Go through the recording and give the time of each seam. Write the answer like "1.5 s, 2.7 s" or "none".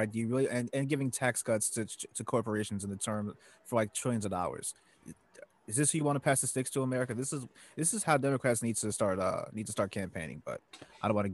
none